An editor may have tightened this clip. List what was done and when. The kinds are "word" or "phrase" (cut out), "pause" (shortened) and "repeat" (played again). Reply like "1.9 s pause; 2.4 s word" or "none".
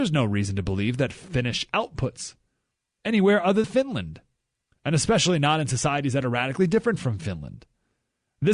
1.7 s phrase; 3.6 s word